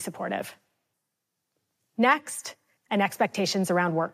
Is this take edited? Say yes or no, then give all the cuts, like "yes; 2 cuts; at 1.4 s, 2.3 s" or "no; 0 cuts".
yes; 1 cut; at 2.8 s